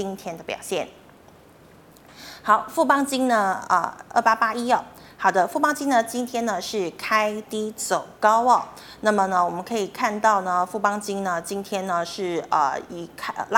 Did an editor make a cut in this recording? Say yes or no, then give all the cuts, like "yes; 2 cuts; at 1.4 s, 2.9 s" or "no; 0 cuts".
no; 0 cuts